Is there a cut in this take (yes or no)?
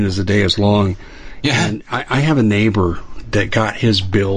no